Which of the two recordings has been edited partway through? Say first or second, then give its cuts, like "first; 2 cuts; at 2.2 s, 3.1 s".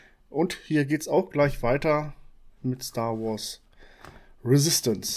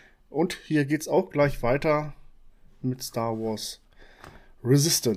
first; 1 cut; at 2.6 s